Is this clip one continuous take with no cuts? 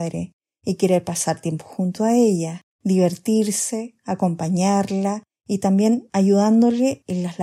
no; 1 cut; at 2.7 s

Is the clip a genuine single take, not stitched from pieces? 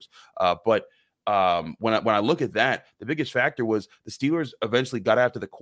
yes; 0 cuts

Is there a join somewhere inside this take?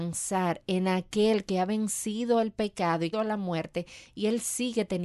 yes; 1 cut; at 3.1 s

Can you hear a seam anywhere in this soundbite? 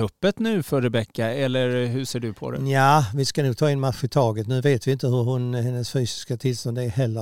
no; 0 cuts

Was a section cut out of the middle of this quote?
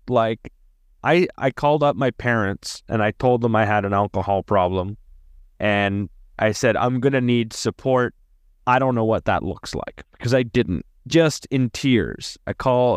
yes; 1 cut; at 11.0 s

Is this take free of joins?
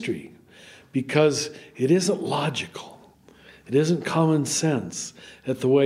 yes; 0 cuts

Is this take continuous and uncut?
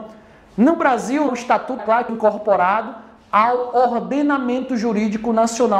no; 3 cuts; at 1.3 s, 1.8 s, 2.1 s

